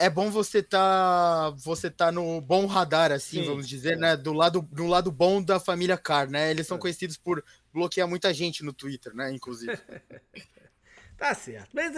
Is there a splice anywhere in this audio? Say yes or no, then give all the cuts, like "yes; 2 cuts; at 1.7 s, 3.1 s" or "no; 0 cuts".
no; 0 cuts